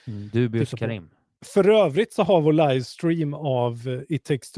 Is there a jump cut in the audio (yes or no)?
no